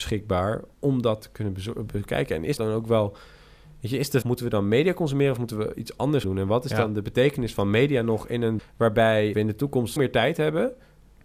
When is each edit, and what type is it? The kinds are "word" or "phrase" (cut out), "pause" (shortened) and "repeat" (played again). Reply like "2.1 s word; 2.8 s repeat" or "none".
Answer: 2.6 s word; 4.2 s word; 6.2 s word; 8.6 s word; 9.3 s word; 10.0 s word